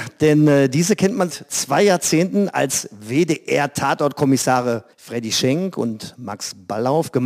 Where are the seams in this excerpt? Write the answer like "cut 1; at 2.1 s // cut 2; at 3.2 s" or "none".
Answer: cut 1; at 1.3 s // cut 2; at 4.9 s